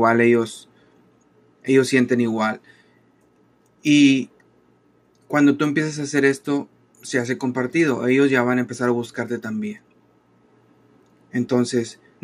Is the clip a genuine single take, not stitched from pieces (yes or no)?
yes